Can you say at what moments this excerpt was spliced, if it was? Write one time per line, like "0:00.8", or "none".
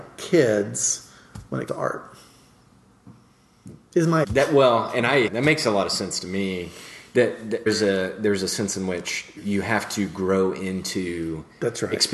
0:01.7
0:04.2
0:05.3
0:07.7
0:09.4